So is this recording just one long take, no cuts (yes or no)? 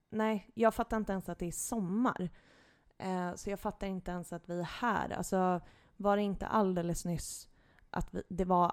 yes